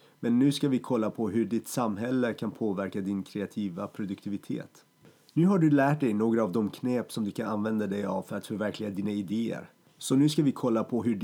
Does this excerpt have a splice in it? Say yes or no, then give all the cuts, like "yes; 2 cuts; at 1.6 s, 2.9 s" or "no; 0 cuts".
no; 0 cuts